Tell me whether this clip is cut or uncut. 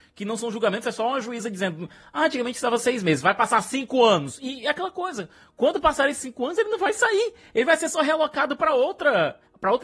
uncut